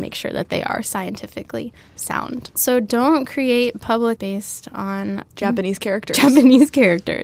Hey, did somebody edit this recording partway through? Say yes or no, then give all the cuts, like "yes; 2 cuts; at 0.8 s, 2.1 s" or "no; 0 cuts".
yes; 1 cut; at 4.2 s